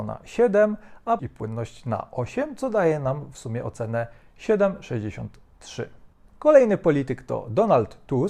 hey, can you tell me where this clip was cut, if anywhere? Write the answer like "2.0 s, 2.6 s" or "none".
1.2 s, 6.1 s

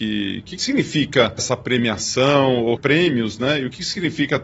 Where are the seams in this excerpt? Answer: 1.4 s, 2.8 s

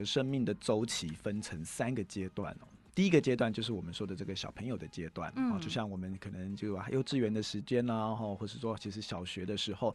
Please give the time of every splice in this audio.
none

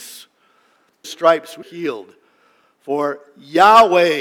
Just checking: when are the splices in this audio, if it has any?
1.0 s, 1.6 s

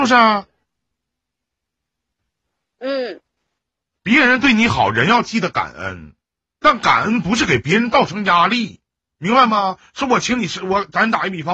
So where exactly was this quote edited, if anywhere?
none

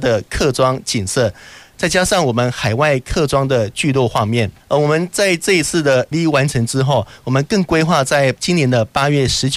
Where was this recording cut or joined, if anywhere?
4.6 s, 6.1 s

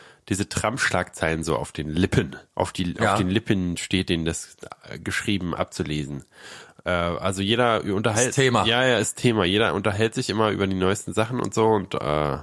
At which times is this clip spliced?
2.5 s

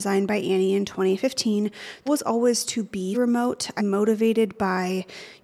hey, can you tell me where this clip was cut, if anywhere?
2.1 s, 3.1 s, 3.8 s

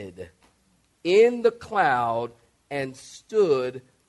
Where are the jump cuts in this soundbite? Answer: none

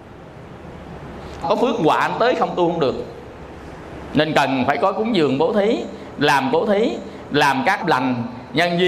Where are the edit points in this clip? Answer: 1.4 s, 6.5 s, 7.8 s

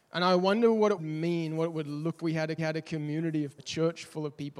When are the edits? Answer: 1.0 s, 2.2 s, 2.6 s, 3.6 s

